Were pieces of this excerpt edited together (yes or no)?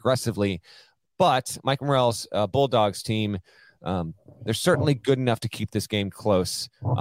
no